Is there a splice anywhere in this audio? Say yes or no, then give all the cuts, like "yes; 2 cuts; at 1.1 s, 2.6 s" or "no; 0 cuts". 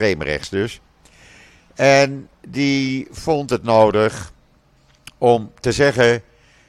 no; 0 cuts